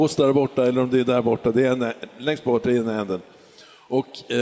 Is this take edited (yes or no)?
no